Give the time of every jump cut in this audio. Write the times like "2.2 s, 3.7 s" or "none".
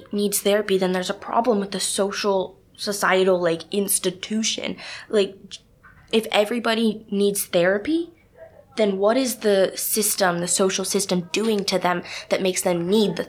none